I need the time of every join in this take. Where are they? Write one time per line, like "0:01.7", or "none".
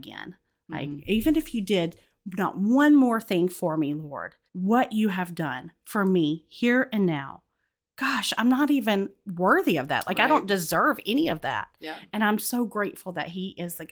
0:04.5